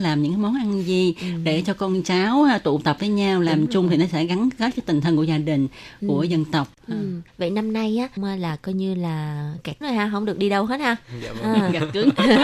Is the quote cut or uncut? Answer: cut